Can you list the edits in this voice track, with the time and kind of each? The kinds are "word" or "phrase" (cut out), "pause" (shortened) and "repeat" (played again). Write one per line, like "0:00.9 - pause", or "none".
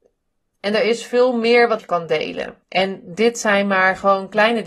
0:01.8 - phrase
0:02.6 - pause